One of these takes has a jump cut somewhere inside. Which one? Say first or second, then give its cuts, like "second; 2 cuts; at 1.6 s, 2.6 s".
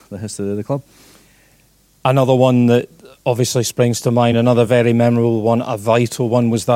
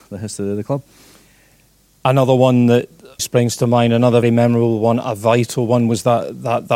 second; 2 cuts; at 3.2 s, 4.2 s